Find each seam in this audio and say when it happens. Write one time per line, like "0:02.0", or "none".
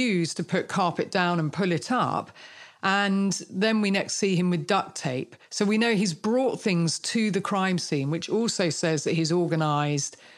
0:05.4